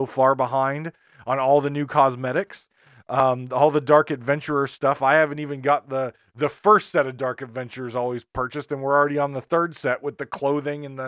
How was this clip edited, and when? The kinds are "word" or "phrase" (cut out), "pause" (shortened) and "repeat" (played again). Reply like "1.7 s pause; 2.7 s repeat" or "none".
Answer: none